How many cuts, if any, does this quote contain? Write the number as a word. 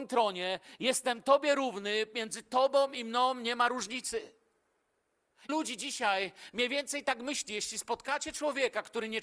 one